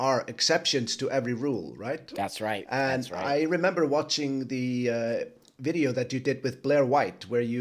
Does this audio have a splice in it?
no; 0 cuts

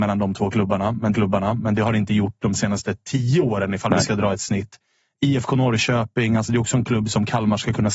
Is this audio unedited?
no; 1 cut; at 1.1 s

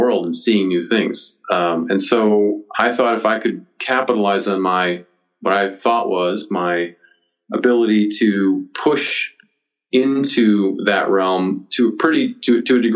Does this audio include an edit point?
no; 0 cuts

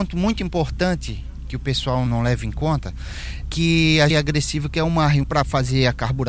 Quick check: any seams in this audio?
yes; 4 cuts; at 2.1 s, 3.4 s, 4.1 s, 5.2 s

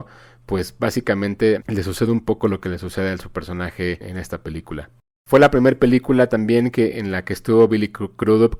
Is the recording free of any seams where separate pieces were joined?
no; 1 cut; at 4.0 s

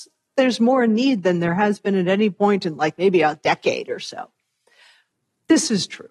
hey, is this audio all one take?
yes; 0 cuts

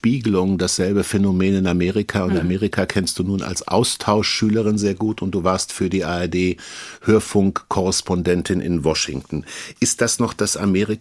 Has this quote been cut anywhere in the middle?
no; 0 cuts

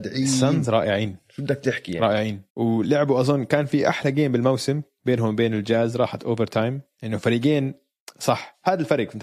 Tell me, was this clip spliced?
yes; 2 cuts; at 2.5 s, 6.9 s

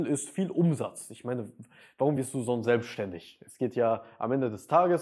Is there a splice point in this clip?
no; 0 cuts

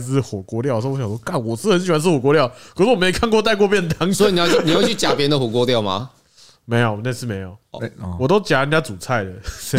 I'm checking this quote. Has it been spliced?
no; 0 cuts

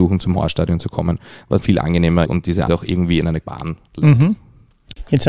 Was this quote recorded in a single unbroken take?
no; 4 cuts; at 1.6 s, 2.2 s, 2.7 s, 3.4 s

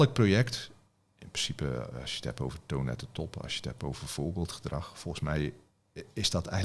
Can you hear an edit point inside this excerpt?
no; 0 cuts

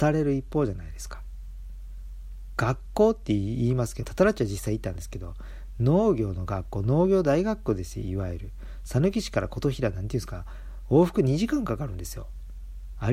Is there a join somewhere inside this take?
yes; 1 cut; at 4.0 s

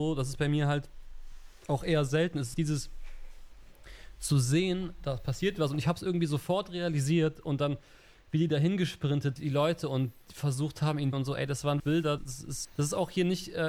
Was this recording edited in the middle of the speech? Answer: yes; 6 cuts; at 2.5 s, 9.4 s, 11.1 s, 11.8 s, 12.2 s, 12.6 s

